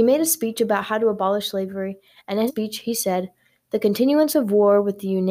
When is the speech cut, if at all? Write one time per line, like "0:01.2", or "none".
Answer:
0:02.5